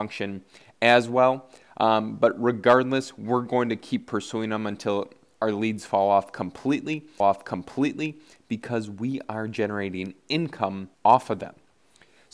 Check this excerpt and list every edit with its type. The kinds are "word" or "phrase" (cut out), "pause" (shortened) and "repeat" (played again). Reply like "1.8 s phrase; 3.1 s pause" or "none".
7.2 s repeat; 10.9 s pause